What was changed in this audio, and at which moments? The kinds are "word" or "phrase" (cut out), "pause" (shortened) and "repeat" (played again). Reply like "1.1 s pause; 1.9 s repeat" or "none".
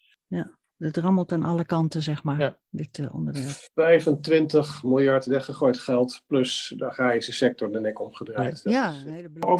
none